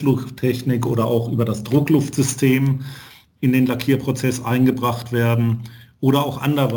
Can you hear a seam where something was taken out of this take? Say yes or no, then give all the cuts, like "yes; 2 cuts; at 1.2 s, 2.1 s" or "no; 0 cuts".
no; 0 cuts